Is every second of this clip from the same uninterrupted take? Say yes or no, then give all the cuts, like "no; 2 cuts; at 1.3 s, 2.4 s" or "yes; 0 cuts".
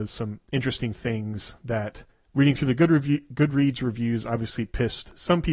no; 1 cut; at 2.1 s